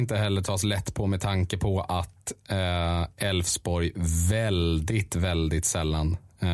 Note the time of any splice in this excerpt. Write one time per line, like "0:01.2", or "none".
none